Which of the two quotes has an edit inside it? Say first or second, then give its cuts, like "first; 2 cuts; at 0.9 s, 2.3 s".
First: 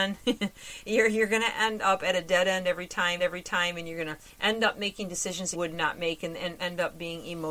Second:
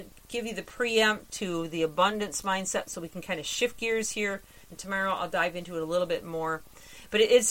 first; 3 cuts; at 3.2 s, 5.5 s, 6.6 s